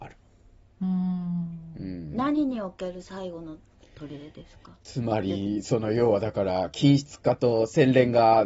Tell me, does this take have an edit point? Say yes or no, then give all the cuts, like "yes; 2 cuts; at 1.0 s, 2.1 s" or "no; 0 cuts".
no; 0 cuts